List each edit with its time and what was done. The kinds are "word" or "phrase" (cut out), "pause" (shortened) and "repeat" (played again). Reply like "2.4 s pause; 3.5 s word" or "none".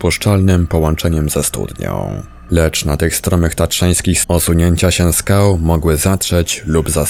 4.2 s word